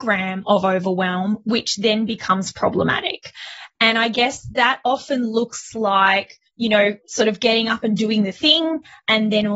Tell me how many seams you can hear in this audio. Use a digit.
2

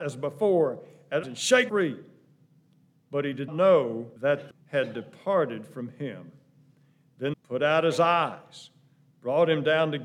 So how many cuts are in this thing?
6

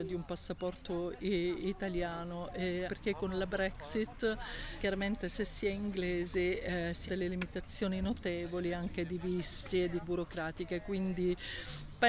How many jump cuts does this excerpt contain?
4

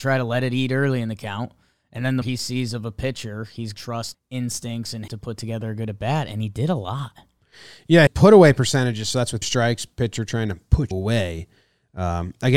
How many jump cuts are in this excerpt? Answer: 7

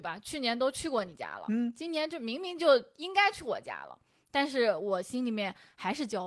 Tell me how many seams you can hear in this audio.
0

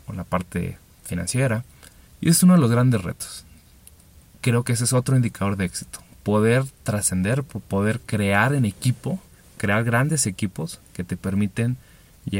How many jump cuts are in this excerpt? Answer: 1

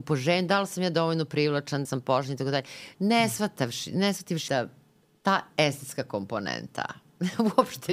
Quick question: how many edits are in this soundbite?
2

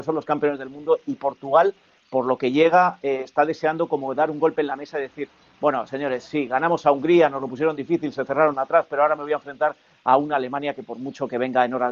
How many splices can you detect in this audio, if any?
0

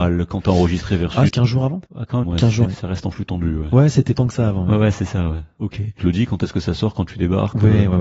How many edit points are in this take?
6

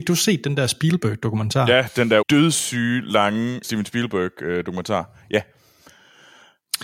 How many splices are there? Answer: 2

